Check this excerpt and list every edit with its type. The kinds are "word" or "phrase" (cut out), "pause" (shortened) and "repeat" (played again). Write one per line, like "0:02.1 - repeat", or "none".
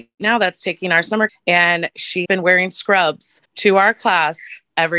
0:01.3 - word
0:02.3 - word
0:03.4 - pause